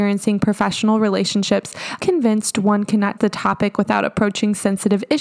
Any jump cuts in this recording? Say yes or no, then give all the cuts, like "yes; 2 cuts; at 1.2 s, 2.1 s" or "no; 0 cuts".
yes; 2 cuts; at 2.0 s, 3.2 s